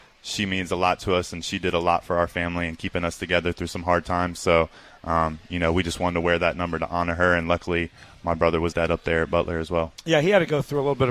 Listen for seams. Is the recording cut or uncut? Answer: cut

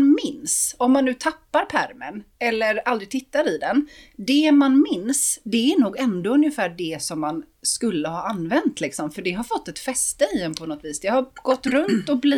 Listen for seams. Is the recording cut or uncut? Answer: uncut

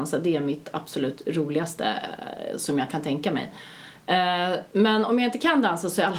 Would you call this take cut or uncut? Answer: uncut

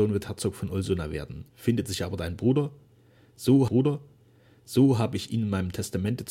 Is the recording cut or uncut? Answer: cut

